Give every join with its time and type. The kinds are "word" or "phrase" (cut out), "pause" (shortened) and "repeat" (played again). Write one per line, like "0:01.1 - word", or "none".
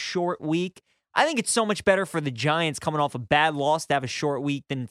none